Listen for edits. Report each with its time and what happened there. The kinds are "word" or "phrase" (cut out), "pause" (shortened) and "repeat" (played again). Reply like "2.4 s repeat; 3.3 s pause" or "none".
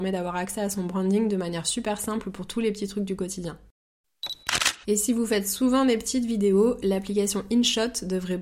4.8 s pause